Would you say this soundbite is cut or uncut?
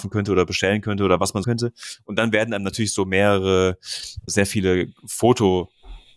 cut